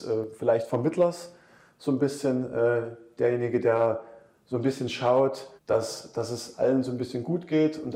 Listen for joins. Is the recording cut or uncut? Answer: cut